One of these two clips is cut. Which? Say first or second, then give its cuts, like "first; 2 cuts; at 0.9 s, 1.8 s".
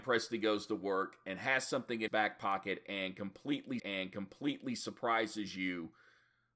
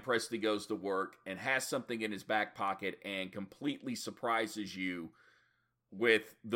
first; 2 cuts; at 2.1 s, 3.8 s